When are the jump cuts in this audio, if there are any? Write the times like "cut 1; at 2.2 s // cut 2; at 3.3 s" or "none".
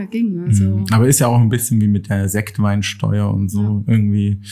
none